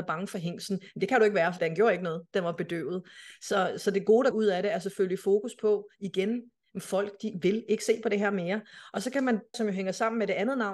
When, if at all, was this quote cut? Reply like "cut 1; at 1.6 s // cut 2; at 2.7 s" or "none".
cut 1; at 1.6 s // cut 2; at 4.3 s // cut 3; at 9.5 s